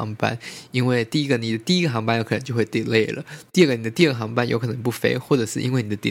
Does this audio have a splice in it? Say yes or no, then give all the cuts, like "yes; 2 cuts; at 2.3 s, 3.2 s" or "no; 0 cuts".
no; 0 cuts